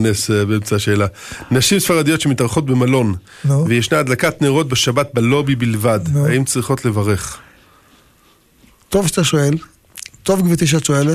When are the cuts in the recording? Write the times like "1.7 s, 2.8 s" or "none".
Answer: none

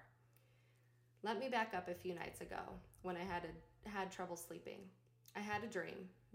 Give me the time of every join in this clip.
none

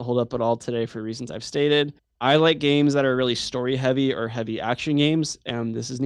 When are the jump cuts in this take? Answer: 2.0 s

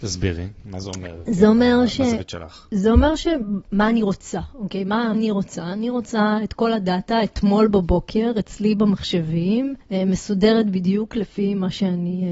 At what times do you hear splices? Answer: 5.1 s, 9.8 s

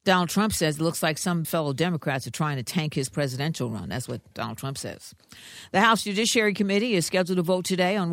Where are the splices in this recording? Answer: 1.4 s, 3.1 s

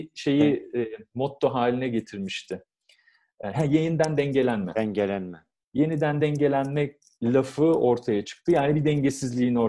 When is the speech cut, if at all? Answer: none

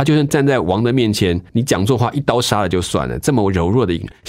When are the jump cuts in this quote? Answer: 1.5 s

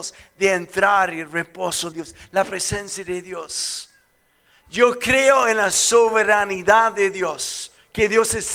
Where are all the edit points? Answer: 1.9 s

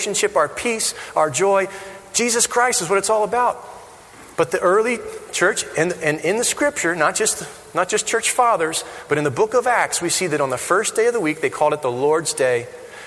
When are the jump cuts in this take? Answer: 4.3 s

